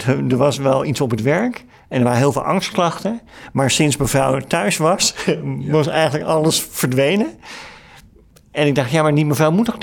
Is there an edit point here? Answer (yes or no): no